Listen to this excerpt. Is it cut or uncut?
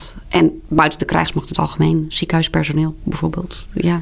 uncut